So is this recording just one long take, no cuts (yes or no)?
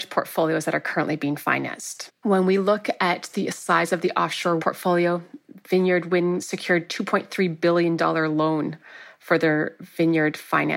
no